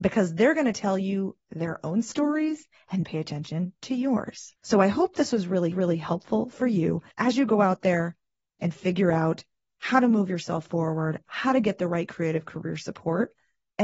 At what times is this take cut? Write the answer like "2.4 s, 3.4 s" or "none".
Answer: 3.0 s, 4.6 s, 5.7 s, 7.1 s